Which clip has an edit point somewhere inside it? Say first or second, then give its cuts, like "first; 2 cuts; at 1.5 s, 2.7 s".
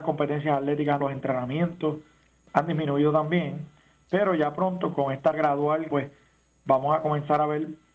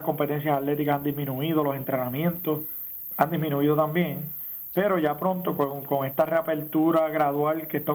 first; 4 cuts; at 1.0 s, 4.9 s, 5.3 s, 5.9 s